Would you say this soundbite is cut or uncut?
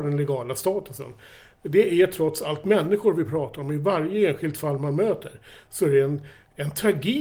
uncut